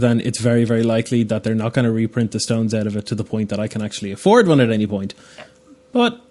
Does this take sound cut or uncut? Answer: uncut